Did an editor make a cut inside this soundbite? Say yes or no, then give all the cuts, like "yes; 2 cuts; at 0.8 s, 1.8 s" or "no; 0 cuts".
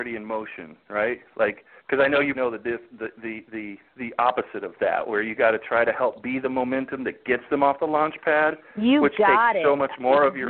yes; 2 cuts; at 1.8 s, 2.3 s